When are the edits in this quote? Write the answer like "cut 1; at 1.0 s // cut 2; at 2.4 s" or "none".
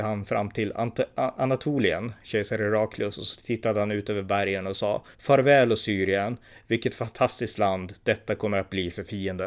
cut 1; at 5.1 s

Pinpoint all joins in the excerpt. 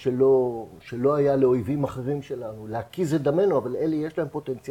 none

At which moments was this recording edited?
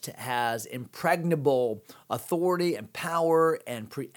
none

